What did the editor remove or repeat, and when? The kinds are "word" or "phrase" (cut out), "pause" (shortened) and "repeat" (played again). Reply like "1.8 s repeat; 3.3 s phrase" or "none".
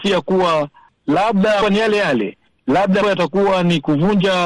1.6 s phrase; 3.0 s word